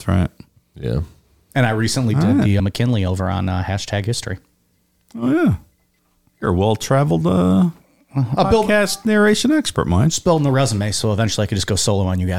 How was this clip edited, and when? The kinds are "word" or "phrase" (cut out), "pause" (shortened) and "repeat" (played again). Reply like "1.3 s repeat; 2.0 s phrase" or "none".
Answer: 2.6 s phrase